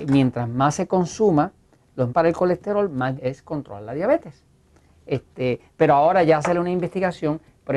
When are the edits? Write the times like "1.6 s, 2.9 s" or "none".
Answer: 2.1 s, 3.2 s